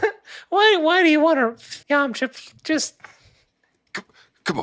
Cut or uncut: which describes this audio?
cut